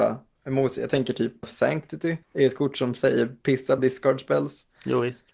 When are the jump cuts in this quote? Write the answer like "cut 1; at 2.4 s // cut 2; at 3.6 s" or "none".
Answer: cut 1; at 1.4 s // cut 2; at 2.2 s // cut 3; at 3.8 s